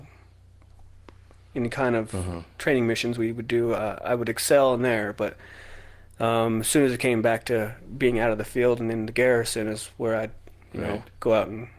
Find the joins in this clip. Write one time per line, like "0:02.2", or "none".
none